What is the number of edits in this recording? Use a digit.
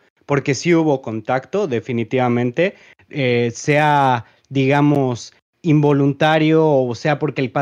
0